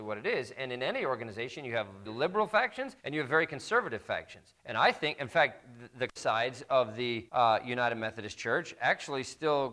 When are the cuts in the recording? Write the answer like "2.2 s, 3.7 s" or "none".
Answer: 2.1 s, 3.0 s, 4.6 s, 6.2 s, 7.3 s